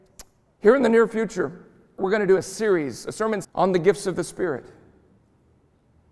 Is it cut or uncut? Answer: cut